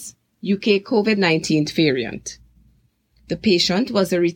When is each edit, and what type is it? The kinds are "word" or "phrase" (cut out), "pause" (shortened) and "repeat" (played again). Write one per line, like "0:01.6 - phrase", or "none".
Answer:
none

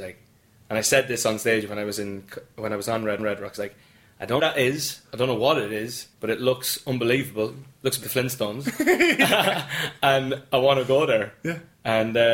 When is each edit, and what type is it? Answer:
0:03.2 - repeat
0:03.6 - word
0:04.4 - phrase
0:06.1 - pause
0:08.0 - word

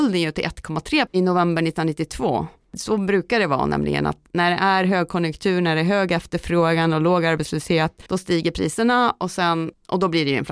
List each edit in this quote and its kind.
0:01.1 - word
0:08.1 - pause

